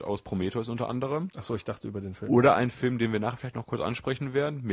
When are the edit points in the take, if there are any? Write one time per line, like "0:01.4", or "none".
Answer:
none